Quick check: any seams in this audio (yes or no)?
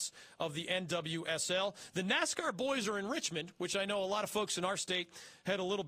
no